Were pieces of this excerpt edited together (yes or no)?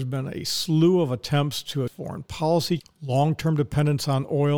yes